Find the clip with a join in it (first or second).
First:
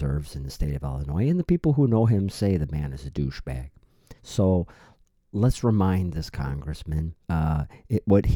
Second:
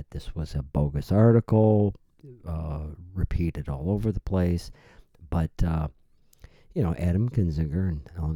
first